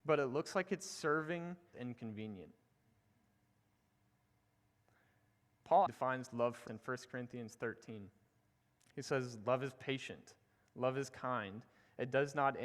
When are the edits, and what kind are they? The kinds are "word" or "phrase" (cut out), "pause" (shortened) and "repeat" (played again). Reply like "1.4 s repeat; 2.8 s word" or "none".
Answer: 1.7 s phrase; 5.9 s word; 6.7 s word